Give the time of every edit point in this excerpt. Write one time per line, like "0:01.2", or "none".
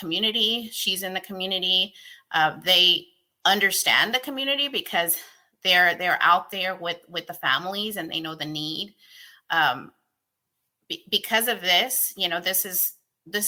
none